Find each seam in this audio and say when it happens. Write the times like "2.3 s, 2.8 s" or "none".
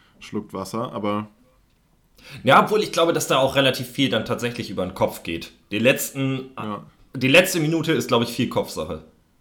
none